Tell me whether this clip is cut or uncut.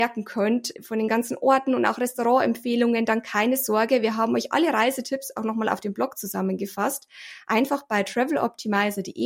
uncut